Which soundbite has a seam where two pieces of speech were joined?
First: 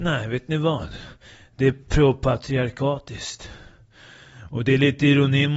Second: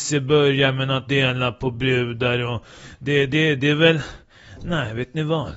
second; 1 cut; at 1.1 s

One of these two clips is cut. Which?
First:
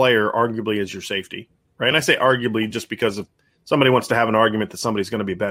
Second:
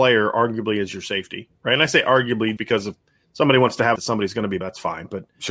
second; 4 cuts; at 1.6 s, 2.6 s, 4.0 s, 4.6 s

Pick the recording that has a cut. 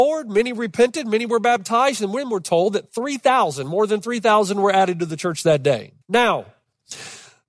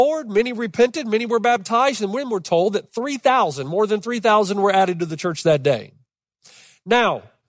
first; 1 cut; at 6.0 s

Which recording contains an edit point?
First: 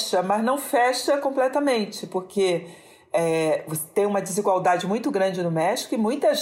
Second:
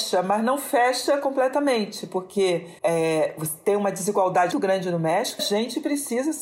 second; 3 cuts; at 2.8 s, 4.5 s, 5.4 s

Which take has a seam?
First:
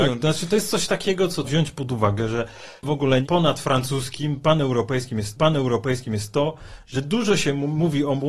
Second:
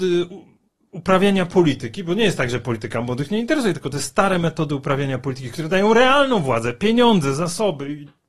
first; 3 cuts; at 1.4 s, 2.8 s, 5.4 s

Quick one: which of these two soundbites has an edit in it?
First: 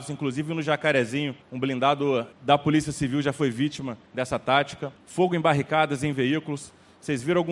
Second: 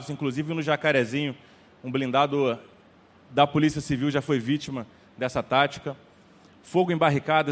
first; 4 cuts; at 1.4 s, 2.3 s, 4.1 s, 5.0 s

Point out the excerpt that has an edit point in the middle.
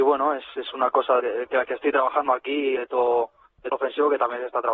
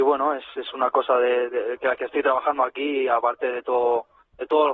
first; 3 cuts; at 1.2 s, 2.8 s, 3.7 s

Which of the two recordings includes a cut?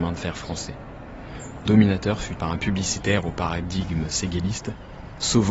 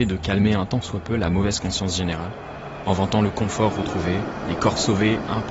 first; 2 cuts; at 1.7 s, 2.4 s

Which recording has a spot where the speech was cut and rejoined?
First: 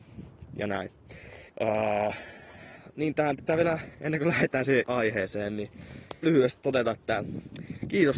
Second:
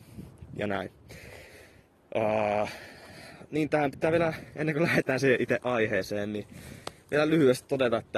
first; 3 cuts; at 1.5 s, 4.8 s, 6.2 s

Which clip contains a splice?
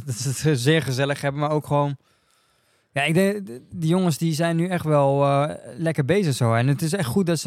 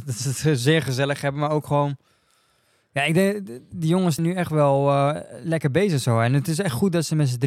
second; 1 cut; at 4.2 s

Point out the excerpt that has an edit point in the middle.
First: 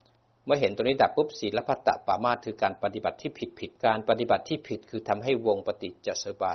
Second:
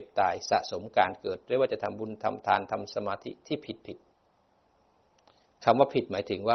first; 1 cut; at 3.8 s

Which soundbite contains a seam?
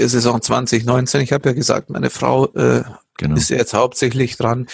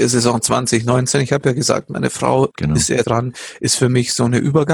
second; 2 cuts; at 2.5 s, 3.0 s

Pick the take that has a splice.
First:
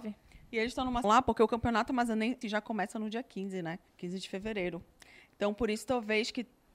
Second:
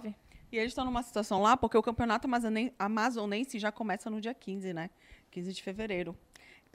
first; 3 cuts; at 1.0 s, 2.4 s, 3.9 s

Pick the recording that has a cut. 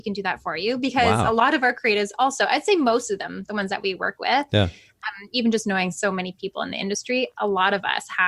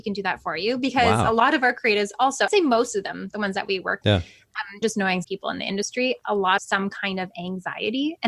second; 5 cuts; at 2.5 s, 4.0 s, 4.8 s, 5.2 s, 6.6 s

